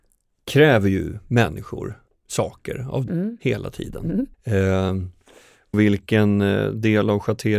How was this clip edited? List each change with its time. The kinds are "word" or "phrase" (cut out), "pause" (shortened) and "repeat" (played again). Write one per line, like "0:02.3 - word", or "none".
0:02.1 - pause
0:03.1 - word
0:04.3 - pause
0:05.7 - phrase